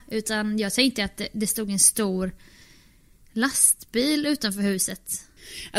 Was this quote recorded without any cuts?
yes; 0 cuts

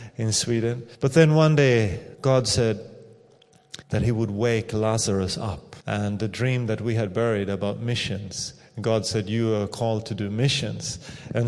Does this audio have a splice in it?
yes; 4 cuts; at 0.9 s, 2.1 s, 3.8 s, 5.8 s

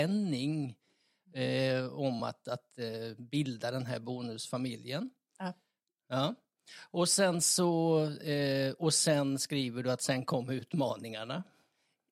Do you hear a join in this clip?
no; 0 cuts

